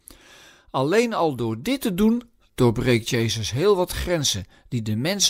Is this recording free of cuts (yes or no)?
yes